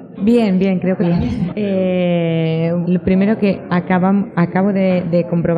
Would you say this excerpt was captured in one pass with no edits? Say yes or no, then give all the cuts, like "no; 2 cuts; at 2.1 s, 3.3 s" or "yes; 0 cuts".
no; 3 cuts; at 1.0 s, 2.8 s, 3.7 s